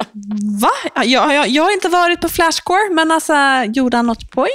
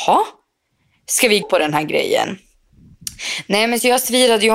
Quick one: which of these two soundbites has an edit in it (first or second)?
second